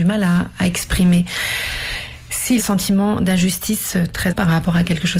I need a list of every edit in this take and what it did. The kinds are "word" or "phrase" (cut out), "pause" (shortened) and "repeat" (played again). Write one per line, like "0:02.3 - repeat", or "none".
0:02.6 - phrase
0:04.3 - word